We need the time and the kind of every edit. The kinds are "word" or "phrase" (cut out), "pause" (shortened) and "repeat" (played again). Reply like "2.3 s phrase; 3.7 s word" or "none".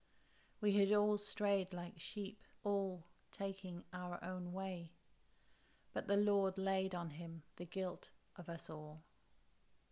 2.6 s pause; 7.5 s pause